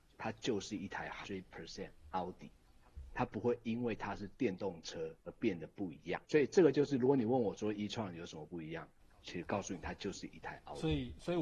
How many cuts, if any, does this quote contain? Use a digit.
3